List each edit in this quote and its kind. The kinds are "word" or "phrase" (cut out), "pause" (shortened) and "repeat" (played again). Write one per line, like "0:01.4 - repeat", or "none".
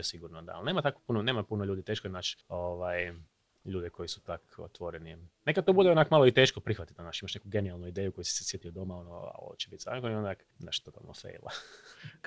0:02.4 - pause
0:10.5 - pause